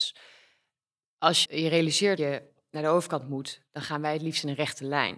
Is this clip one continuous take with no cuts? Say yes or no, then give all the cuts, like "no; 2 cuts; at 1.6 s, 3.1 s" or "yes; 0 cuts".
no; 3 cuts; at 1.4 s, 2.2 s, 3.7 s